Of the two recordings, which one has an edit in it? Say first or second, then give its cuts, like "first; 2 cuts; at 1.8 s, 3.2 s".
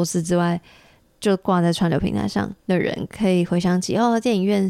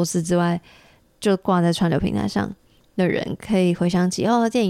first; 1 cut; at 2.6 s